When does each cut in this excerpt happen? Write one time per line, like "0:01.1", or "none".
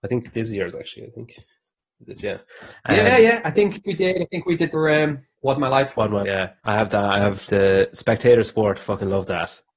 0:03.8
0:04.7
0:05.3
0:06.2
0:06.6
0:07.5

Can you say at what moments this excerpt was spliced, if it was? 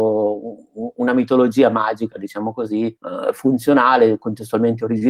0:03.0

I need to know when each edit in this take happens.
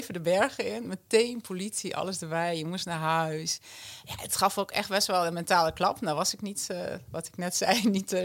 none

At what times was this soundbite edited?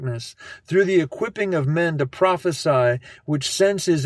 none

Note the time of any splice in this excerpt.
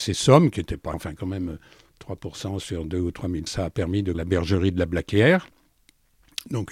0:00.9
0:03.5
0:04.1

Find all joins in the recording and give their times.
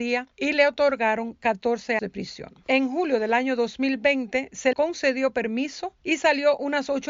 0:02.0
0:04.7

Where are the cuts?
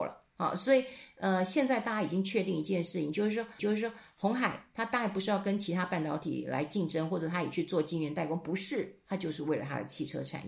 0:03.6

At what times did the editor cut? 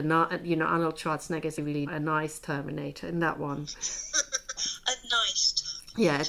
0:01.6
0:01.9
0:04.6

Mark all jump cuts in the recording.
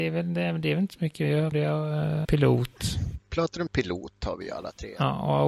0:01.5
0:02.2
0:03.7

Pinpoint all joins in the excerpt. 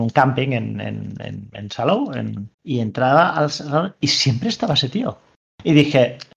0:02.5

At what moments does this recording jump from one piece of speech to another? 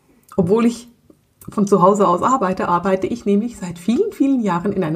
none

